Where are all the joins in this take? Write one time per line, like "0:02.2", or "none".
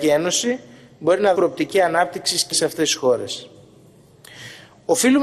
0:01.4
0:02.5